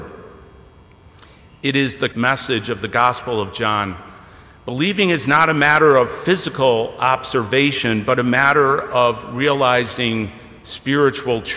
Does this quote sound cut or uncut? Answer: cut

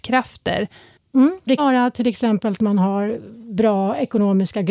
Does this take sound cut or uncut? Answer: cut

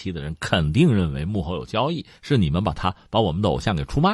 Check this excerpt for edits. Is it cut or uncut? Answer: uncut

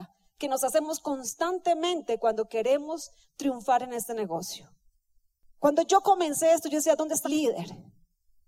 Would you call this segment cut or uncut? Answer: cut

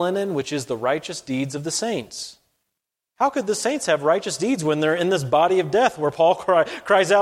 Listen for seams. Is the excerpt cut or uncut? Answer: uncut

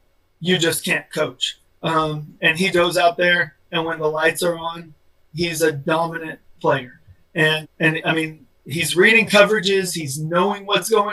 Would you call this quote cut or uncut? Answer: cut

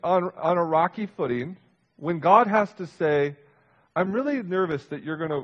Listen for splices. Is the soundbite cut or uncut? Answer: uncut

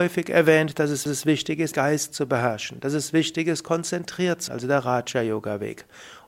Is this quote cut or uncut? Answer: cut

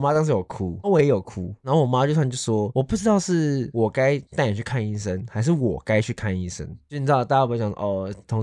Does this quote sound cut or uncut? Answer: cut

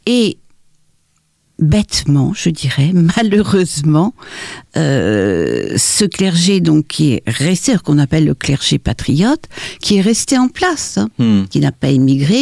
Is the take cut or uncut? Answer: uncut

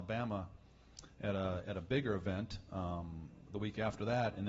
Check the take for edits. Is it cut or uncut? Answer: cut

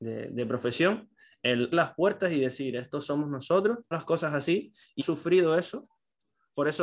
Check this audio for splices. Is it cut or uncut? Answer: cut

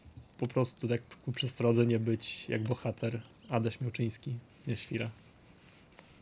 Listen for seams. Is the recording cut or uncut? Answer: uncut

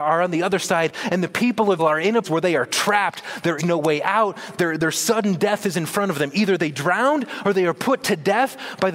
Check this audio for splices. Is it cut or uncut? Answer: cut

